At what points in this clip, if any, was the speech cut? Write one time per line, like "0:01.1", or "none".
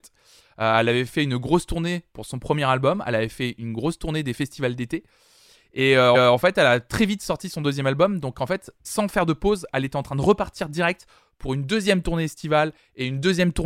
0:06.1
0:08.8